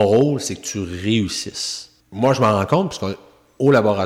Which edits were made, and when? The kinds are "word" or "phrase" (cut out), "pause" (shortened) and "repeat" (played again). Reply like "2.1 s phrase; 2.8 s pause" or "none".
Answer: 2.0 s pause